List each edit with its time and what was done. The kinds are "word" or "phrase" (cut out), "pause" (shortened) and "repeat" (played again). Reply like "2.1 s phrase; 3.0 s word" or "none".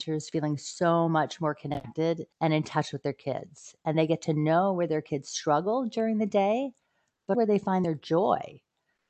2.3 s pause; 7.3 s word